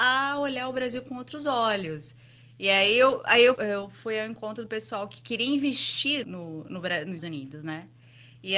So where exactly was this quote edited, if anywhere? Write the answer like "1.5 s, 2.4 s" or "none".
3.6 s, 4.7 s, 6.2 s, 7.2 s